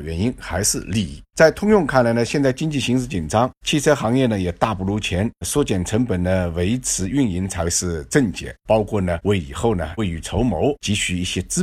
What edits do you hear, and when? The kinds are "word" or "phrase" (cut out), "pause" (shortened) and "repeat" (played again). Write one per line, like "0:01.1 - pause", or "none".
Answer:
none